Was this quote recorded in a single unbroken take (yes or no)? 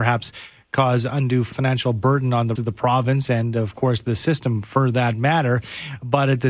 no